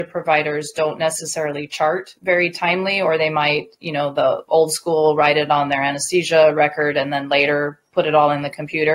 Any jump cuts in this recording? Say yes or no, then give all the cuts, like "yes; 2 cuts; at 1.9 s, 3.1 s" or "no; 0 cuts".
no; 0 cuts